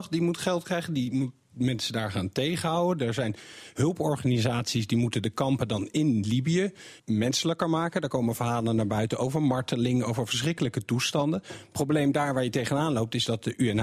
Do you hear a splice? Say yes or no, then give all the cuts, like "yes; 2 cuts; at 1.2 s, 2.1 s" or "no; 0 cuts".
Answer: yes; 1 cut; at 7.0 s